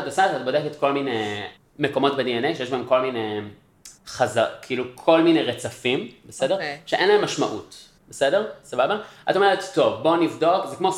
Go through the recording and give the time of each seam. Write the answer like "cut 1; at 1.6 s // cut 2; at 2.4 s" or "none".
cut 1; at 1.6 s // cut 2; at 4.0 s // cut 3; at 8.0 s